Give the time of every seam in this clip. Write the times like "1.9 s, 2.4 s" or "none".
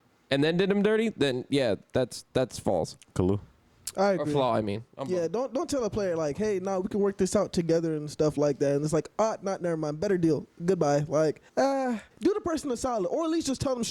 11.5 s, 12.1 s